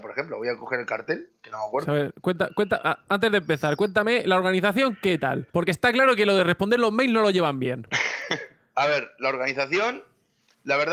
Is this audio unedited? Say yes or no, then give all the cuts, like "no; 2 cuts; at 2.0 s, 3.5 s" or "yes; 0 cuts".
no; 1 cut; at 5.5 s